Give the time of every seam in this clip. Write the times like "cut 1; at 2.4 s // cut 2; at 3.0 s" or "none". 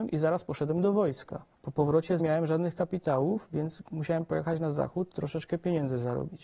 cut 1; at 1.5 s // cut 2; at 2.2 s